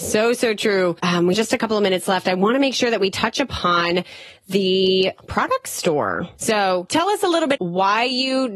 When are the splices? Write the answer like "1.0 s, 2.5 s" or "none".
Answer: 1.3 s, 7.6 s